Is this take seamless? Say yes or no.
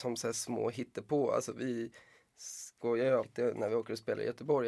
yes